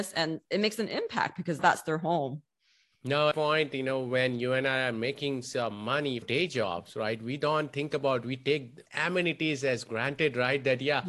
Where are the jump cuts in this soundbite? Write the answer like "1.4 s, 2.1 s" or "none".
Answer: 1.6 s, 3.3 s, 6.2 s, 8.9 s